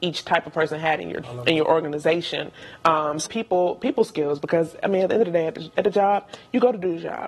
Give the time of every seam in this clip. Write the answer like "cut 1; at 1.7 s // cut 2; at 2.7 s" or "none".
cut 1; at 1.2 s // cut 2; at 3.2 s

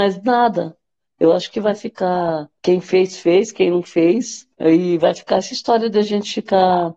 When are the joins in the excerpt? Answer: cut 1; at 2.6 s // cut 2; at 4.5 s

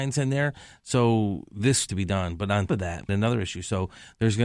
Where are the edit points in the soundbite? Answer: cut 1; at 1.9 s // cut 2; at 2.7 s // cut 3; at 3.1 s

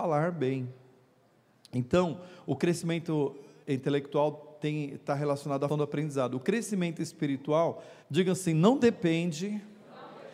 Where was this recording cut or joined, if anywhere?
cut 1; at 5.7 s // cut 2; at 8.0 s

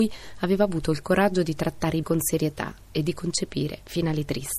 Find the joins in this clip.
cut 1; at 2.0 s

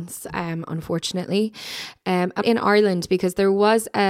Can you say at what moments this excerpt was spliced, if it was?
cut 1; at 2.4 s

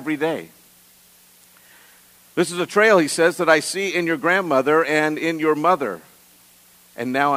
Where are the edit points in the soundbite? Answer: none

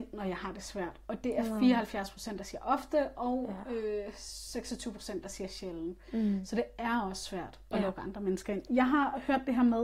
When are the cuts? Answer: none

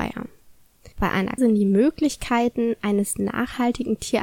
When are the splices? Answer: cut 1; at 0.9 s // cut 2; at 1.4 s

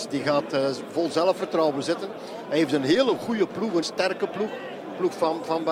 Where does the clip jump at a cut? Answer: cut 1; at 3.8 s

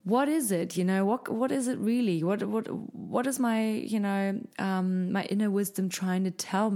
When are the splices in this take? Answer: cut 1; at 4.5 s

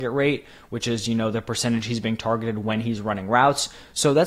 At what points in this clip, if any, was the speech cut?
none

